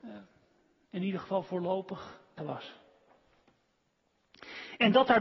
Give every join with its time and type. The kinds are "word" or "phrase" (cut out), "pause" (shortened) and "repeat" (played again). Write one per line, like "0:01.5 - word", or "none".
0:02.4 - word